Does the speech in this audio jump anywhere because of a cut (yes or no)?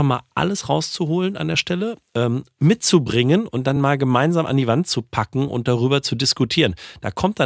no